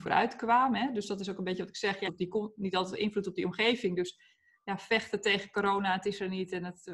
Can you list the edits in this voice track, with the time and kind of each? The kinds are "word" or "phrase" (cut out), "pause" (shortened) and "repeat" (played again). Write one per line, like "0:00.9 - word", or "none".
0:02.1 - phrase
0:04.6 - pause